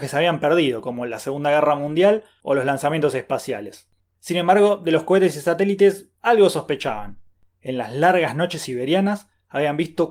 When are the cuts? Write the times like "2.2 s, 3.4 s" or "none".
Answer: none